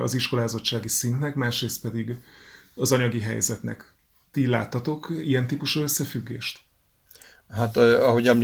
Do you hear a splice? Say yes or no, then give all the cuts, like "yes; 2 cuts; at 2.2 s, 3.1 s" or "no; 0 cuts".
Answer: no; 0 cuts